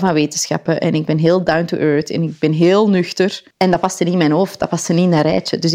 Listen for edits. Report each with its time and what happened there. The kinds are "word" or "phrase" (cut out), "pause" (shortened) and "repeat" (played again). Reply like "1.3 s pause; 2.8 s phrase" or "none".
3.5 s pause